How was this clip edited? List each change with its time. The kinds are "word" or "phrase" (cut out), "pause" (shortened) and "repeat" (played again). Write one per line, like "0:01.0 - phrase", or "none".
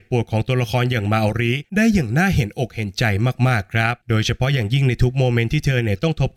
0:01.6 - pause
0:04.0 - pause

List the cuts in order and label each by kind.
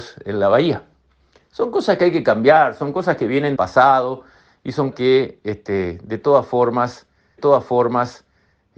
0:03.6 - word
0:04.9 - word
0:07.4 - repeat

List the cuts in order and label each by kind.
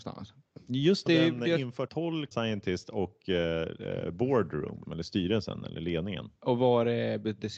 0:01.1 - phrase
0:01.9 - word
0:02.3 - phrase
0:04.8 - word

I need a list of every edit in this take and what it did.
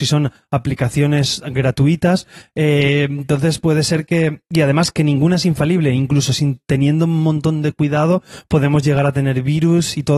none

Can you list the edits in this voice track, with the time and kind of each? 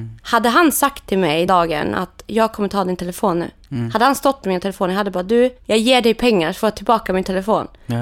0:01.5 - word

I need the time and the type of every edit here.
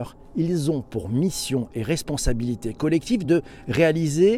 none

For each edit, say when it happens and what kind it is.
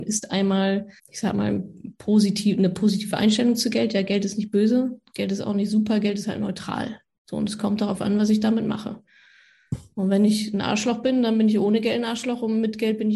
0:01.0 - pause

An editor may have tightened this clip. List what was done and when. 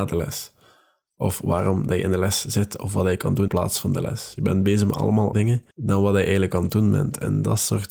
0:03.5 - word
0:05.3 - word
0:05.7 - pause

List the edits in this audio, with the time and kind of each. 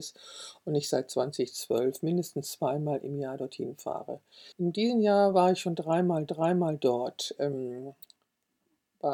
0:04.5 - pause
0:06.3 - repeat

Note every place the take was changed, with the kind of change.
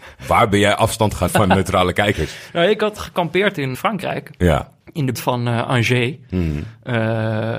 0:01.3 - word
0:03.0 - phrase
0:03.7 - phrase
0:04.8 - pause
0:05.1 - word

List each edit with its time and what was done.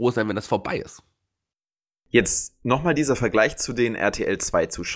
none

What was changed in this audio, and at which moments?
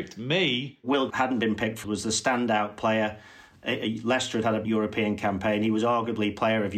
0:01.1 - word
0:01.8 - word
0:04.6 - word

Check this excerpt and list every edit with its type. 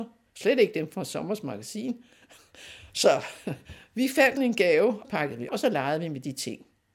0:04.4 - word
0:05.0 - word
0:05.5 - word

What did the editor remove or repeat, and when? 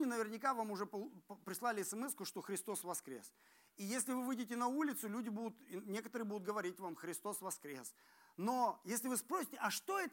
none

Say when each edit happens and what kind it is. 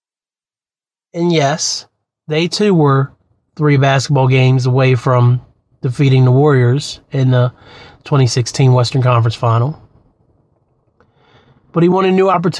none

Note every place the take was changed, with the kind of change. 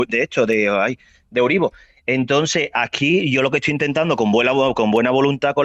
none

